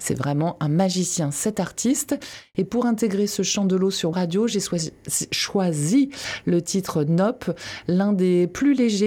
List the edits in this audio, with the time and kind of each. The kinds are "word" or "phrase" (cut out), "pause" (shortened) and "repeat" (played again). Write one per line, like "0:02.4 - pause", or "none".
0:04.1 - word